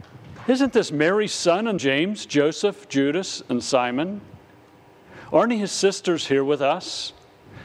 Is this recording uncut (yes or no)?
no